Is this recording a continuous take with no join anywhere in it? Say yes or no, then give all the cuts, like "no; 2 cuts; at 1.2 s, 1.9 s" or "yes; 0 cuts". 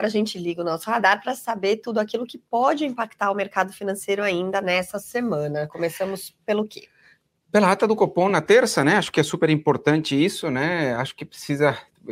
yes; 0 cuts